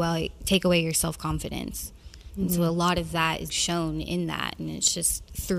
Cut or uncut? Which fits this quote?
cut